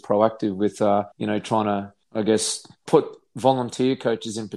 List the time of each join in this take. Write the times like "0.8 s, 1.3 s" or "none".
1.1 s, 2.0 s, 2.9 s